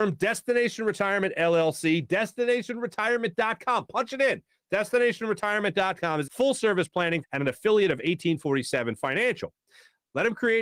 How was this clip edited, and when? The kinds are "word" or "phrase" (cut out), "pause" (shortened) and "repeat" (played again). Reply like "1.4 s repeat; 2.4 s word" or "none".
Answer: 6.3 s word; 7.2 s word